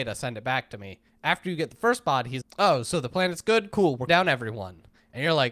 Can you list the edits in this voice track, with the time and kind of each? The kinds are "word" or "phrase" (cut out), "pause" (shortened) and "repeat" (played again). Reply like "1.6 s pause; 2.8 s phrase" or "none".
2.4 s word; 4.1 s word